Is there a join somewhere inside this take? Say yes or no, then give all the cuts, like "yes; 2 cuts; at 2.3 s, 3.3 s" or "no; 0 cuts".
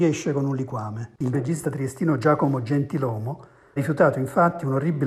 yes; 2 cuts; at 1.3 s, 3.8 s